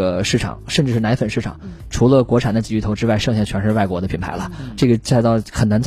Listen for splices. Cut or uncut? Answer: cut